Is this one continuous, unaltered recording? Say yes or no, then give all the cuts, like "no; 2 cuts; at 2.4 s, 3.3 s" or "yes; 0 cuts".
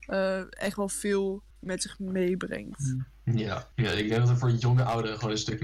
no; 2 cuts; at 1.5 s, 3.7 s